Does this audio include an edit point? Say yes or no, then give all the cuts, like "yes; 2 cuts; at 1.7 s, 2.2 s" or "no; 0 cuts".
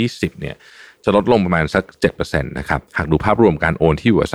yes; 1 cut; at 2.9 s